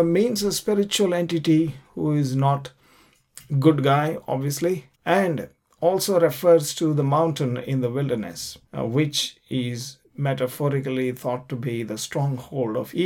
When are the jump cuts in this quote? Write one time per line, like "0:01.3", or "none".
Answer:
0:04.9
0:08.7